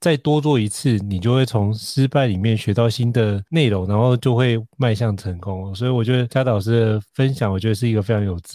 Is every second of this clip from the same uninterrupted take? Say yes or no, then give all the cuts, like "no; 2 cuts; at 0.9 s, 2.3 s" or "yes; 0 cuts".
no; 1 cut; at 7.1 s